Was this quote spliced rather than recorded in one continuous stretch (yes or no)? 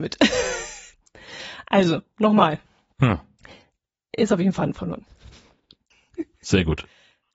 no